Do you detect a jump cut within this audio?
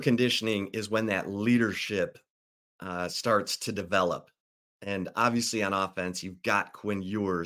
no; 0 cuts

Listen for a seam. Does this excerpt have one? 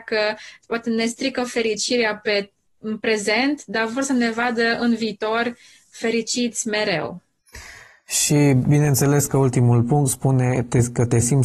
no; 0 cuts

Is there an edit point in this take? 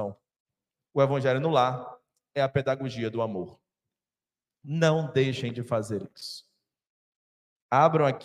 no; 0 cuts

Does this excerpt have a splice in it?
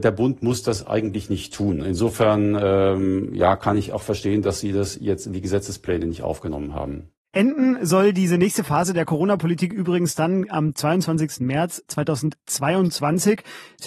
no; 0 cuts

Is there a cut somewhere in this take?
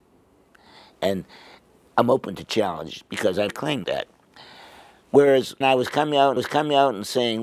yes; 4 cuts; at 3.5 s, 3.8 s, 5.6 s, 6.4 s

